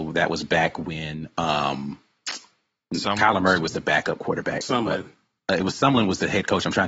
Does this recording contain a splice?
no; 0 cuts

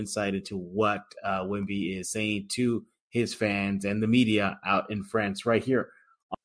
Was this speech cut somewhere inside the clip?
no; 0 cuts

